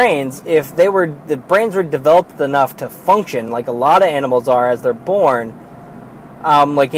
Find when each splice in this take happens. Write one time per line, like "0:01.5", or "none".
none